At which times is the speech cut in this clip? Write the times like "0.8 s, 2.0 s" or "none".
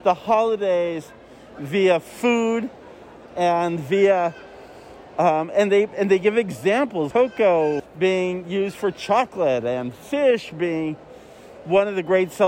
7.1 s, 7.8 s